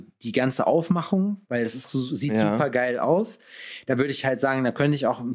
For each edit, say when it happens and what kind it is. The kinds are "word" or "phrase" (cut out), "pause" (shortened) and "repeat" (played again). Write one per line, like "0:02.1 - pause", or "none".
0:01.8 - word